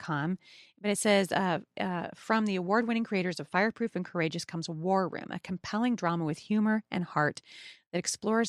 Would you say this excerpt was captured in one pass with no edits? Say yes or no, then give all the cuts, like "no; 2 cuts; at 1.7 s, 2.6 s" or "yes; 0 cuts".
yes; 0 cuts